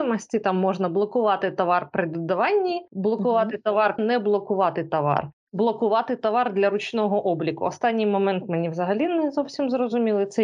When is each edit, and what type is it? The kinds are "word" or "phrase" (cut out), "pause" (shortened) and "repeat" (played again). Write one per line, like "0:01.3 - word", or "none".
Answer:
0:04.0 - phrase
0:05.5 - pause